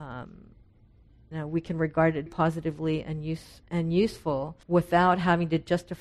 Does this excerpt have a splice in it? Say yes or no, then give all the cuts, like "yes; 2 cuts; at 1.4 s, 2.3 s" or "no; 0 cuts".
yes; 4 cuts; at 1.3 s, 2.3 s, 3.6 s, 4.6 s